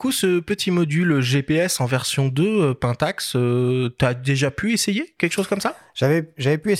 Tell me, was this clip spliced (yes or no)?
no